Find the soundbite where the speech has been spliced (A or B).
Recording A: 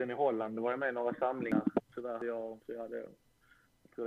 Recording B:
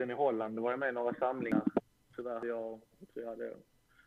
A